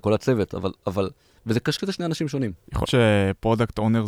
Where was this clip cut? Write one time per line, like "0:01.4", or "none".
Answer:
0:01.8
0:02.8